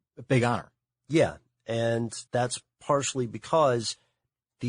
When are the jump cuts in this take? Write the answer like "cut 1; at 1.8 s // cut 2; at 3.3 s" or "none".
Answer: cut 1; at 2.3 s